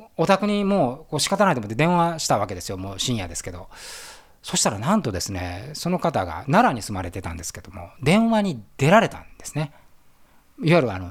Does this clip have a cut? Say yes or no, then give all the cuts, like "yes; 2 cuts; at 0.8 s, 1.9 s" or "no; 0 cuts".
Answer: yes; 1 cut; at 9.3 s